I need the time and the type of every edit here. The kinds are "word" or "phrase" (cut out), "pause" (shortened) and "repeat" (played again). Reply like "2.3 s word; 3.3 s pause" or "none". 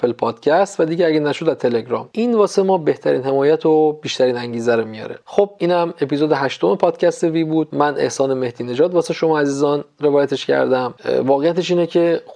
none